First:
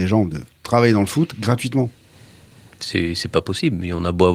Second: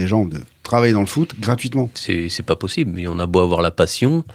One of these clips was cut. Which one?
second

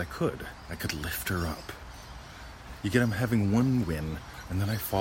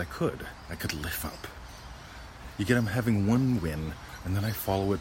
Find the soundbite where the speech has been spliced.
second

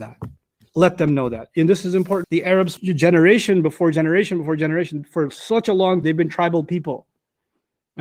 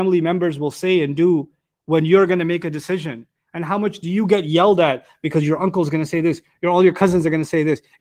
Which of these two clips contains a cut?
first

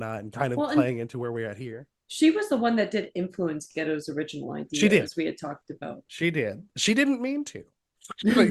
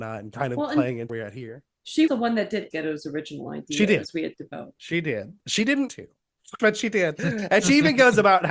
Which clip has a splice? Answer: second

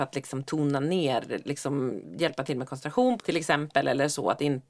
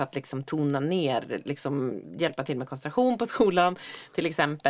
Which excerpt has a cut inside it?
first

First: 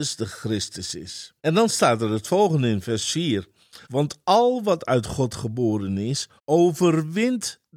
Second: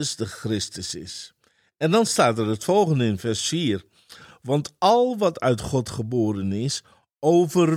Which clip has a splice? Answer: first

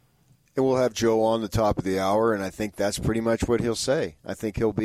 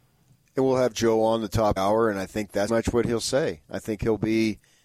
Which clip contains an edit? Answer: second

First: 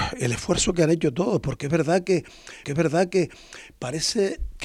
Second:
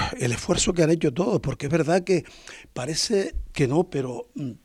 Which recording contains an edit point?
first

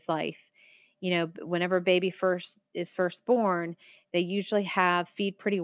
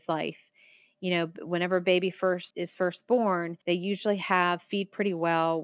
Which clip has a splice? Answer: second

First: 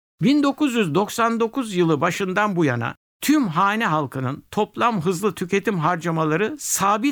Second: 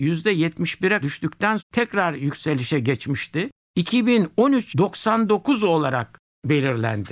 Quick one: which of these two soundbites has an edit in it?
second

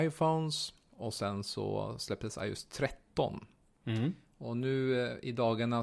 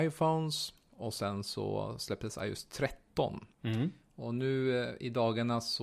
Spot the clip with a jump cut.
second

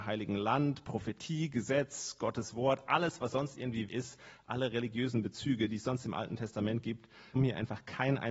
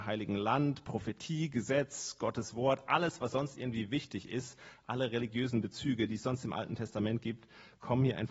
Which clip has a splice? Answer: first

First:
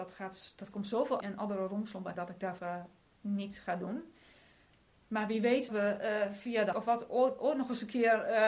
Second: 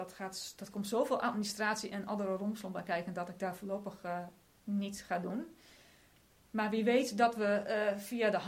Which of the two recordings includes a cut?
first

